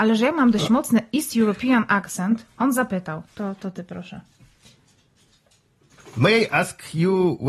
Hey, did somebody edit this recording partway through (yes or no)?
yes